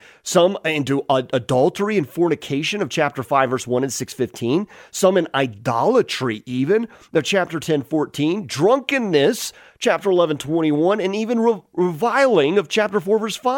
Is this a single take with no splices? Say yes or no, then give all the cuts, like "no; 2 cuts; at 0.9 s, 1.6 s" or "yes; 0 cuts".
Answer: yes; 0 cuts